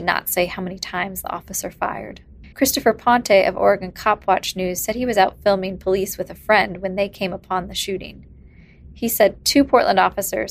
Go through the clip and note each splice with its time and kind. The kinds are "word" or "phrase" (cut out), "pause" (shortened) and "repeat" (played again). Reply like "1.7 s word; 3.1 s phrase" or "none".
2.5 s pause